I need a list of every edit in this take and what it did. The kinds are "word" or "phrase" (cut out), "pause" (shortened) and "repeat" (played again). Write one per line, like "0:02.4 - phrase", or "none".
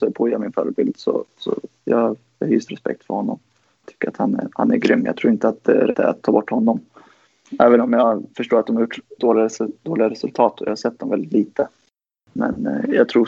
0:02.7 - word
0:05.9 - word
0:09.2 - word